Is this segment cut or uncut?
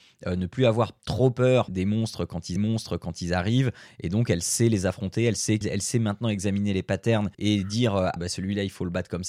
cut